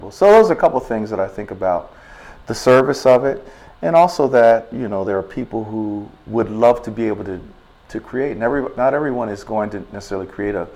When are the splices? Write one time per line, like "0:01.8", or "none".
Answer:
none